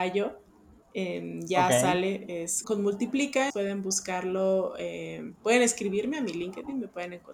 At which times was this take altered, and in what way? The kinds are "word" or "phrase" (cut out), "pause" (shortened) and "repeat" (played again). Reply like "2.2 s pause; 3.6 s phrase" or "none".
2.6 s word; 3.5 s word